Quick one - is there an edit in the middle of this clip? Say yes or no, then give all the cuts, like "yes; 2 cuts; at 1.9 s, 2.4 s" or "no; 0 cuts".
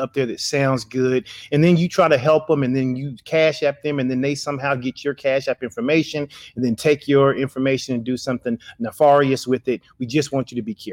no; 0 cuts